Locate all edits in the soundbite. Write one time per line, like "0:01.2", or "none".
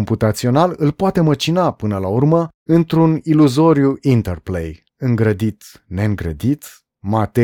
0:04.9